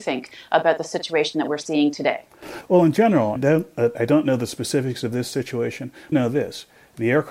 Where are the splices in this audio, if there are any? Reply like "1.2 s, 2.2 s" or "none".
3.4 s, 6.1 s

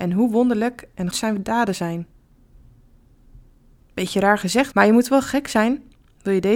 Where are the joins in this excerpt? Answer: 1.1 s, 4.7 s

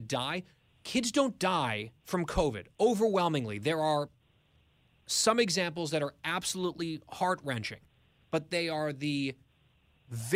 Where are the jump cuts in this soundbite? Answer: none

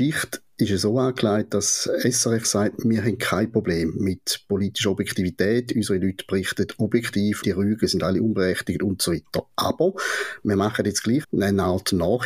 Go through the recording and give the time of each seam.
2.4 s, 7.4 s, 11.2 s

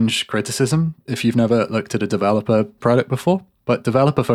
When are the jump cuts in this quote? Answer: 2.8 s

